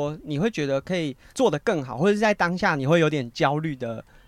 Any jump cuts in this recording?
yes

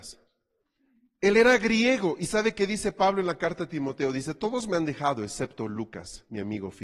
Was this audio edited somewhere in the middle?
no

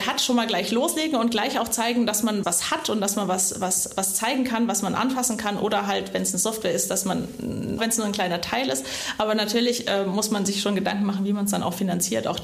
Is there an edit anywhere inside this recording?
yes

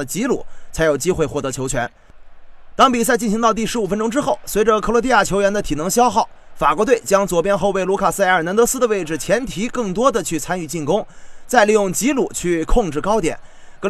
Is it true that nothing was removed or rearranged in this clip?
yes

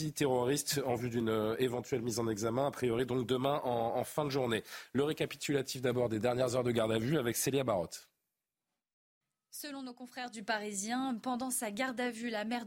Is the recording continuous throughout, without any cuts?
yes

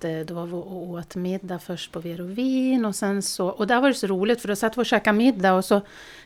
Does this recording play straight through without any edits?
yes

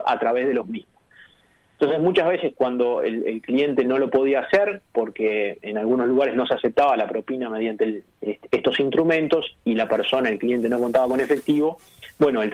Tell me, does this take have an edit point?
no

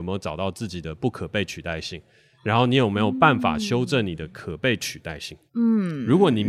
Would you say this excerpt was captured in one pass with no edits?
yes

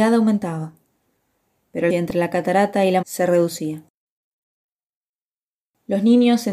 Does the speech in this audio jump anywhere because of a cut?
yes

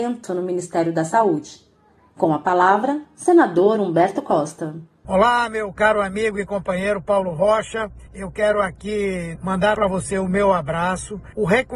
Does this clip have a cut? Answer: no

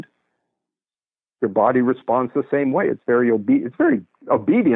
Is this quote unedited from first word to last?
yes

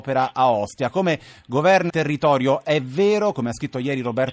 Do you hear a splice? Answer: yes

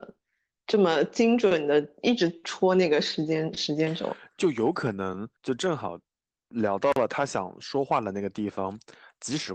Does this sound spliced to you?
yes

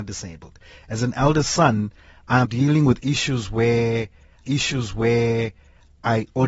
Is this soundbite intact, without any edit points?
no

